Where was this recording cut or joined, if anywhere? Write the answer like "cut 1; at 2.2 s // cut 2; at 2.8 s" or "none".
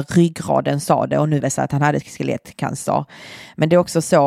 cut 1; at 1.4 s